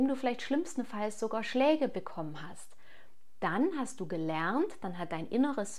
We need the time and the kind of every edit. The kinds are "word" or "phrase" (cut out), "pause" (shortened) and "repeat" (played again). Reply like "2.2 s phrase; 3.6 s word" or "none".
none